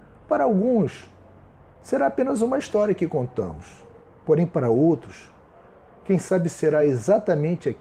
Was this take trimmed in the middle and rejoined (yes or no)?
no